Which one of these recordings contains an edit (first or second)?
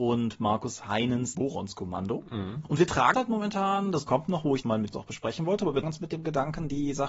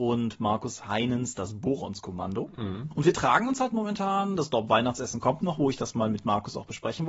first